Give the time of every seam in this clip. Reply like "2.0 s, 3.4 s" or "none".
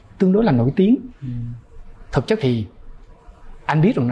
2.4 s